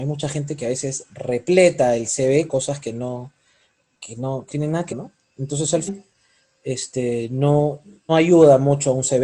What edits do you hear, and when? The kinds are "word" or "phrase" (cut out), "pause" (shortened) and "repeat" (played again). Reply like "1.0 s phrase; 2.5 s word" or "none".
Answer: 2.5 s word; 3.9 s word; 4.5 s word; 4.9 s word; 5.9 s word; 8.1 s word